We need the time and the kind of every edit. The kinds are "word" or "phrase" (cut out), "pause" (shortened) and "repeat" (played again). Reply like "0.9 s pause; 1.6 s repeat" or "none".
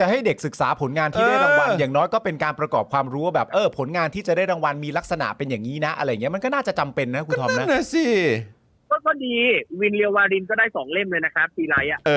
none